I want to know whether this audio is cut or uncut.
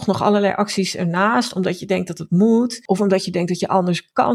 uncut